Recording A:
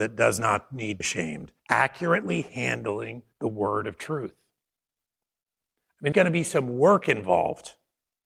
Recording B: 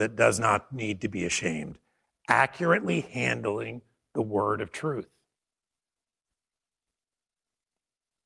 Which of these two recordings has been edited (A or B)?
A